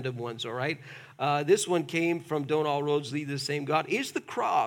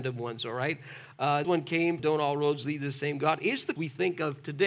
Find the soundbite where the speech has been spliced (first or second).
second